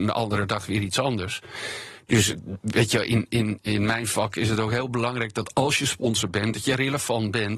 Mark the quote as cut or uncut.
uncut